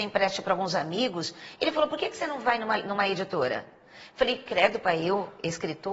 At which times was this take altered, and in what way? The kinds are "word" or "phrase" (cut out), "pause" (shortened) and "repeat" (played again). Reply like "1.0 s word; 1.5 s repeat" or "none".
none